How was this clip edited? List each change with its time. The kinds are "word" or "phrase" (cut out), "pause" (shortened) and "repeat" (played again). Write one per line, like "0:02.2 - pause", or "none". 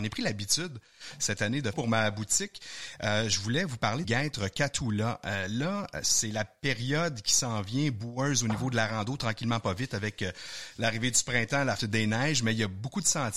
0:01.7 - phrase
0:04.0 - word
0:11.8 - word